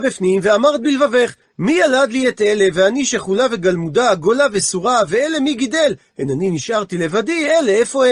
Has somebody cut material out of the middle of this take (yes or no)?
no